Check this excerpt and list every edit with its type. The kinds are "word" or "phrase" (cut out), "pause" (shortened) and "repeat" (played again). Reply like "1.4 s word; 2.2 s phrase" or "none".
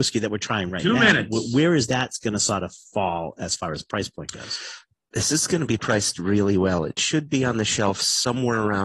none